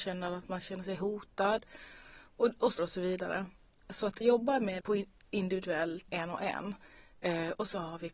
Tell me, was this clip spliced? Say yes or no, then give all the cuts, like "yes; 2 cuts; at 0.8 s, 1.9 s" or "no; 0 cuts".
yes; 4 cuts; at 2.8 s, 4.2 s, 4.8 s, 6.1 s